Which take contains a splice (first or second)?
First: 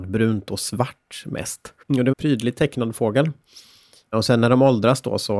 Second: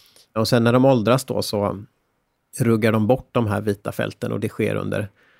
first